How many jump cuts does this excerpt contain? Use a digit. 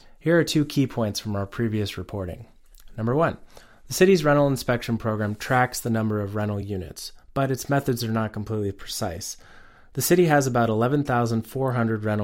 0